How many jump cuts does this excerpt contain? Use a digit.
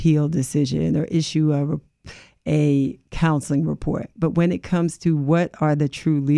0